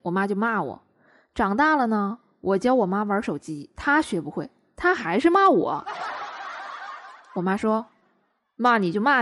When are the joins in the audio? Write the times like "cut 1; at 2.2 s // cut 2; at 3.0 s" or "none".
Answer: none